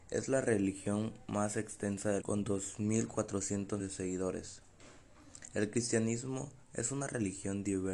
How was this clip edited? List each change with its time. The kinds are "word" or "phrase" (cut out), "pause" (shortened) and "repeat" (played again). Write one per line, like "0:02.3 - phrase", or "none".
0:02.2 - word
0:03.8 - word